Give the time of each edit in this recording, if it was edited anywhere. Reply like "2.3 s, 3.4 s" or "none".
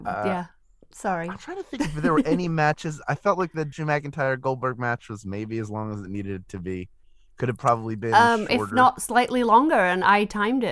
none